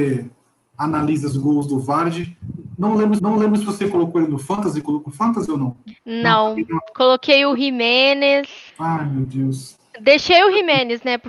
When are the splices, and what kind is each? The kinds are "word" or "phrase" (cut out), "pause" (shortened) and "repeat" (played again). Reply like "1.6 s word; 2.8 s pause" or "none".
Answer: 1.3 s phrase; 3.2 s repeat; 5.1 s word; 6.0 s pause; 8.7 s pause